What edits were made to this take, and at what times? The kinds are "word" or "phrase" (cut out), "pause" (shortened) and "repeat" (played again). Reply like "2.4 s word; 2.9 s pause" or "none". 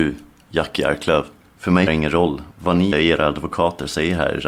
1.4 s pause; 1.9 s word; 2.9 s word